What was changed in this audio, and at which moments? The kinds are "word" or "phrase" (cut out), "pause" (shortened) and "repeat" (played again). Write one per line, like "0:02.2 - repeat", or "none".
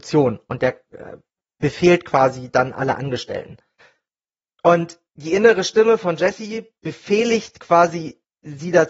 none